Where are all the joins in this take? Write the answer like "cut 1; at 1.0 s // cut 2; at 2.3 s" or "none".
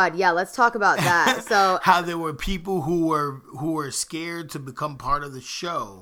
none